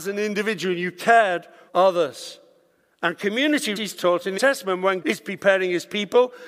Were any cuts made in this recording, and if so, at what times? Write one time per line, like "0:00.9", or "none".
0:01.7
0:03.8
0:04.4
0:05.0

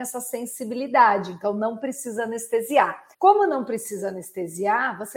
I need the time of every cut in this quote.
0:03.1

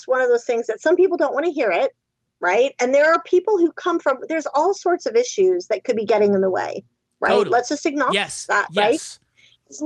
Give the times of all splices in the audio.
none

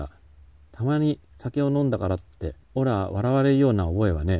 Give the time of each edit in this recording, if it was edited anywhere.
0:02.6

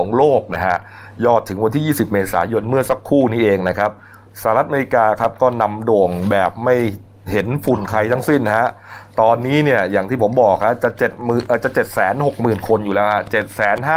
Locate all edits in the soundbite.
none

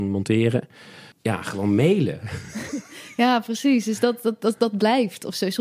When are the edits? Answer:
0:01.1

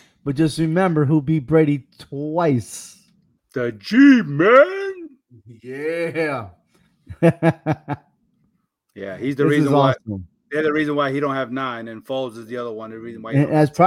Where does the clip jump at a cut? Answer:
0:03.4

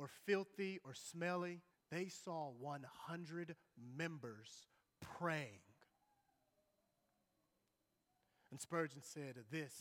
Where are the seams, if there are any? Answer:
0:01.7

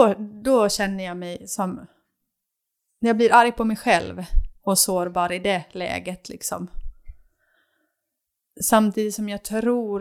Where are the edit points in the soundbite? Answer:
none

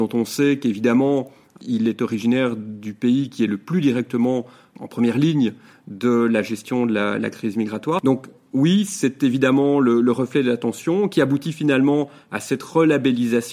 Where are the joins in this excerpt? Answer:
none

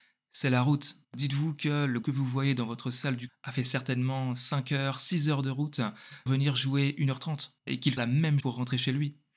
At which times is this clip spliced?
0:01.0
0:02.0
0:03.3
0:06.3
0:07.6
0:08.0
0:08.4

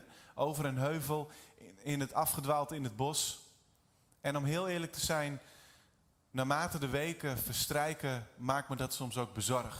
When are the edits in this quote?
none

